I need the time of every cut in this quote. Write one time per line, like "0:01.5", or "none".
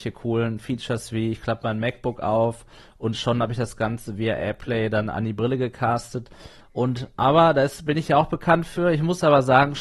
none